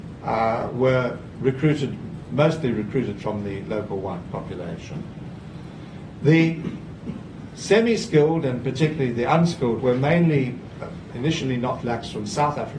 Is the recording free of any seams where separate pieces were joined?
no; 4 cuts; at 3.2 s, 9.8 s, 11.1 s, 11.8 s

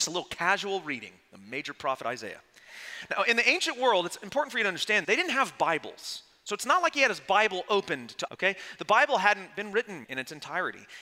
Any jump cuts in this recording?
yes; 3 cuts; at 5.0 s, 8.3 s, 10.0 s

